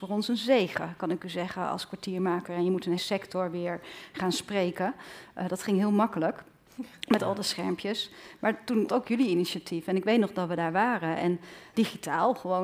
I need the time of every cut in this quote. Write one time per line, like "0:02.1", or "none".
0:03.0
0:08.9
0:11.7